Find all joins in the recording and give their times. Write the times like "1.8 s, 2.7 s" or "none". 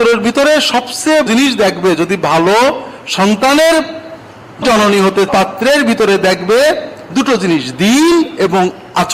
1.3 s, 4.6 s, 5.3 s